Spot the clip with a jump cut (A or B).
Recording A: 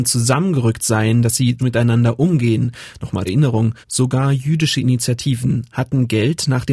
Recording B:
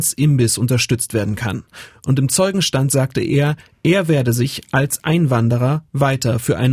A